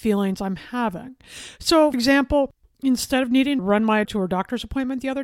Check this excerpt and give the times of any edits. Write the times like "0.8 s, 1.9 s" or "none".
1.9 s, 3.6 s, 4.0 s